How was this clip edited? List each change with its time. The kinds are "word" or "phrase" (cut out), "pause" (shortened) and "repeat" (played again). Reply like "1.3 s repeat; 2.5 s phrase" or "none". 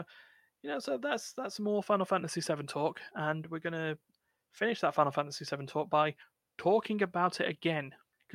none